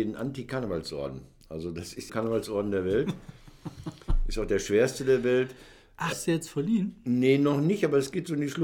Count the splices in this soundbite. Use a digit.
2